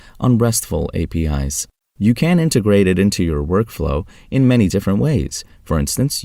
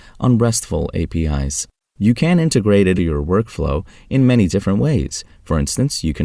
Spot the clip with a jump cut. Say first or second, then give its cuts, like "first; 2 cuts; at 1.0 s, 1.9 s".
second; 1 cut; at 3.0 s